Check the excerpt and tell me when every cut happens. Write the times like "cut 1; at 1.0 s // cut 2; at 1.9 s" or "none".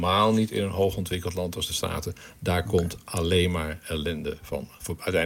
cut 1; at 1.7 s